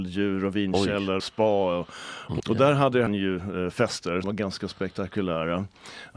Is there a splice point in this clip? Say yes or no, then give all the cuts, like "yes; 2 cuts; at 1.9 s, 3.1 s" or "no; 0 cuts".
yes; 4 cuts; at 1.2 s, 2.4 s, 3.1 s, 4.2 s